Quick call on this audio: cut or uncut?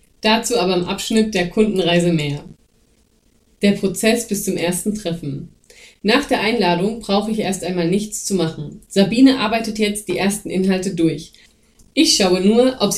uncut